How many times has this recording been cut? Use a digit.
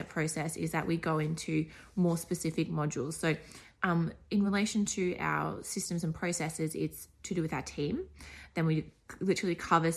0